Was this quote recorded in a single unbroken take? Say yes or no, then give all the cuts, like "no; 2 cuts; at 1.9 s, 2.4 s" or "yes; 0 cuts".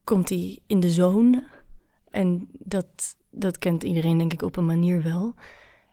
yes; 0 cuts